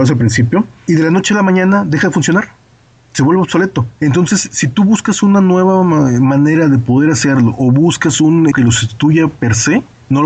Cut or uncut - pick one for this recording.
cut